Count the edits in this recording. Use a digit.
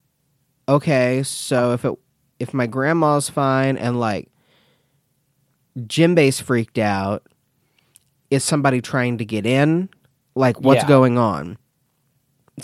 0